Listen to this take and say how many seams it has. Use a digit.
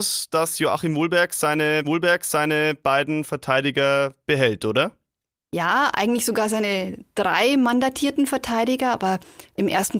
1